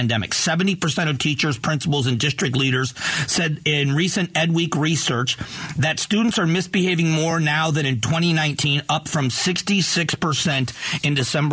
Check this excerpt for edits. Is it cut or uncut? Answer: uncut